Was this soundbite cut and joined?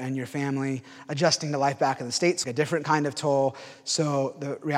yes; 1 cut; at 2.4 s

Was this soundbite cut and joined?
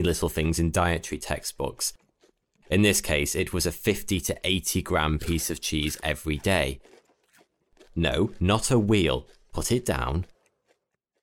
no; 0 cuts

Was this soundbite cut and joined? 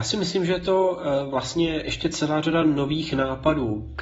no; 0 cuts

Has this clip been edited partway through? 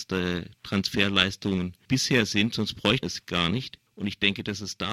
yes; 3 cuts; at 1.8 s, 3.0 s, 3.9 s

